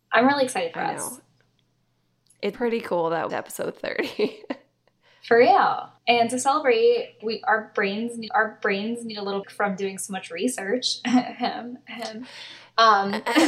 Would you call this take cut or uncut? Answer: cut